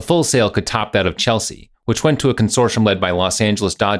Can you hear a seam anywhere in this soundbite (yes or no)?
no